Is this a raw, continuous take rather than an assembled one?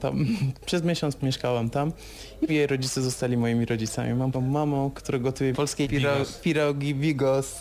no; 5 cuts; at 1.2 s, 2.5 s, 4.3 s, 5.5 s, 5.8 s

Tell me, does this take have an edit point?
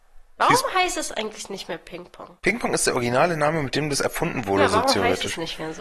yes; 1 cut; at 2.4 s

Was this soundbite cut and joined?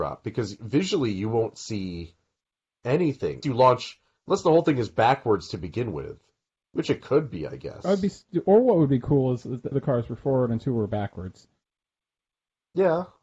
yes; 2 cuts; at 3.4 s, 9.7 s

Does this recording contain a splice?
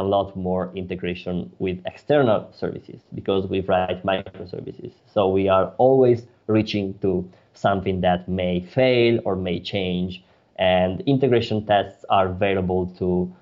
no; 0 cuts

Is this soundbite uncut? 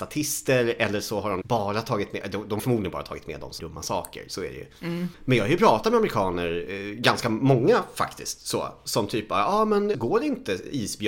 no; 4 cuts; at 1.4 s, 2.6 s, 3.6 s, 9.9 s

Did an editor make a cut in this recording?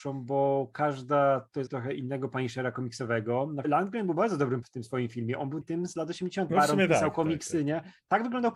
yes; 5 cuts; at 1.7 s, 3.6 s, 4.6 s, 5.6 s, 6.5 s

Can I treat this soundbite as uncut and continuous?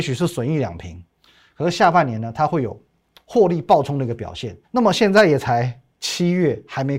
no; 1 cut; at 4.6 s

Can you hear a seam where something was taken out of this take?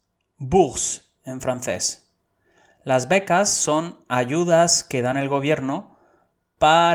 no; 0 cuts

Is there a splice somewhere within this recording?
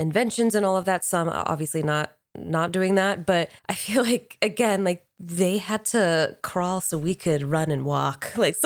yes; 1 cut; at 3.6 s

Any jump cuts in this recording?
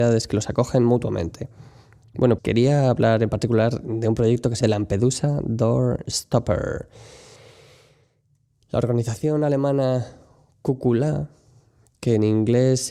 yes; 2 cuts; at 2.4 s, 4.6 s

